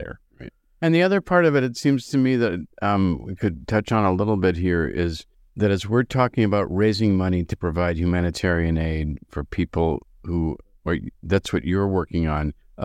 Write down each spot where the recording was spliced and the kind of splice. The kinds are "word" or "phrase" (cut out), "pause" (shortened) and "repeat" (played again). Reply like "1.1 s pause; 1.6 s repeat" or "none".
none